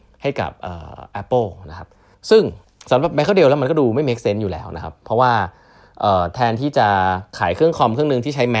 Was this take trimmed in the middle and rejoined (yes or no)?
yes